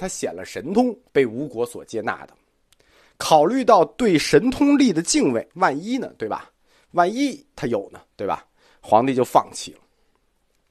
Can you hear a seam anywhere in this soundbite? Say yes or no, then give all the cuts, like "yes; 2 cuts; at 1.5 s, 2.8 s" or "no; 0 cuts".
yes; 2 cuts; at 1.1 s, 5.5 s